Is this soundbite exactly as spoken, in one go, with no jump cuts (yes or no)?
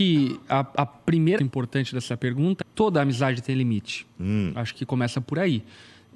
no